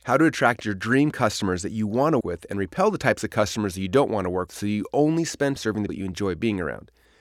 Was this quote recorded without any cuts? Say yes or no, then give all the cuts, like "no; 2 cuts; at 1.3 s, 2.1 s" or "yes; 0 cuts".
no; 4 cuts; at 2.2 s, 4.5 s, 5.6 s, 5.9 s